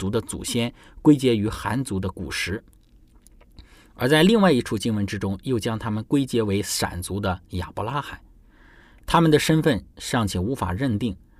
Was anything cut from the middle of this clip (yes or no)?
no